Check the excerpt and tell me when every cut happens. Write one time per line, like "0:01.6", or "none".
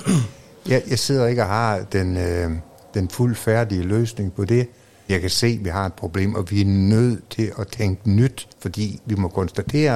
0:01.9
0:05.1
0:08.5